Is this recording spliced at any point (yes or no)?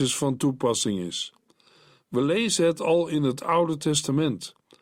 no